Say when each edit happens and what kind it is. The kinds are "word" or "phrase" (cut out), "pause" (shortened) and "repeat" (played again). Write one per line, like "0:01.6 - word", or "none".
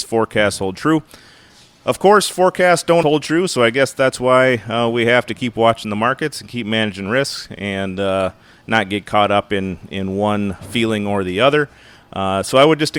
0:03.0 - word